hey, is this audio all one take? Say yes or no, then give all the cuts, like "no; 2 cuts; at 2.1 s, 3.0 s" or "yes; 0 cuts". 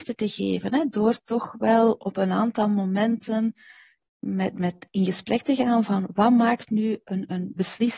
yes; 0 cuts